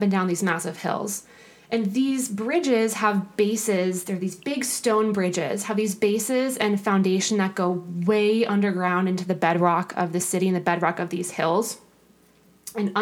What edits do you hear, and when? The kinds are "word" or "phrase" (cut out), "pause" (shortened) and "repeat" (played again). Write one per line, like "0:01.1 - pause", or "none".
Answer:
none